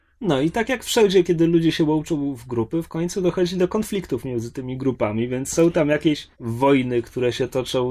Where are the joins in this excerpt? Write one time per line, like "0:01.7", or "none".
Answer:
0:06.3